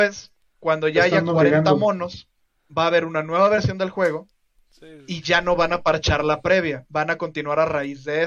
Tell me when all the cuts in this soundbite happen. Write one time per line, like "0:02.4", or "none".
none